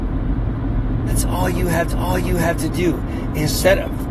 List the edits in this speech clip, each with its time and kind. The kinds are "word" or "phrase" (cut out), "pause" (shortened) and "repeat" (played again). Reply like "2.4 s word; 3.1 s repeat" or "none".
1.9 s repeat